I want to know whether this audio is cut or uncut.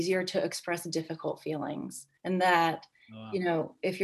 cut